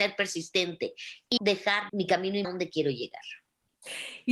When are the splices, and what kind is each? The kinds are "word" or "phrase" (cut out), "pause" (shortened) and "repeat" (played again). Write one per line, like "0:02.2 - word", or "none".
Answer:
0:01.4 - word
0:01.9 - phrase
0:02.4 - phrase